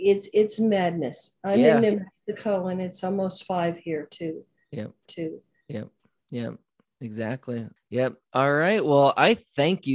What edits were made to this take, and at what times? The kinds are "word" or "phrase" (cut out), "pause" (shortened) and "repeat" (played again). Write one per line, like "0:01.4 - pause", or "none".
0:05.1 - repeat
0:07.8 - pause